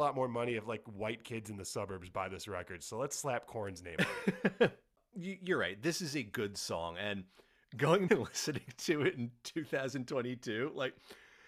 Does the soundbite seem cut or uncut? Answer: cut